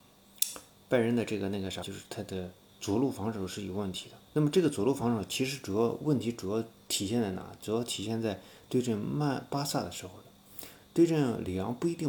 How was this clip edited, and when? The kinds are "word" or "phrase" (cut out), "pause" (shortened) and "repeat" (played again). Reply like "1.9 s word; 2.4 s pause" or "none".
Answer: 1.8 s word; 4.2 s pause